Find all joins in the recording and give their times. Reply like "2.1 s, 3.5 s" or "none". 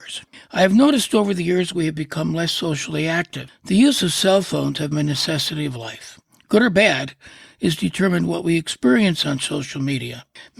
4.9 s